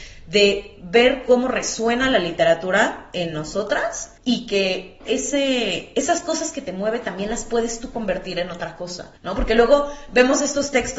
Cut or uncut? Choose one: cut